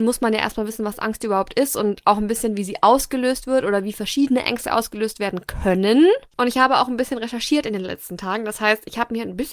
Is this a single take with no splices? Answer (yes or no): no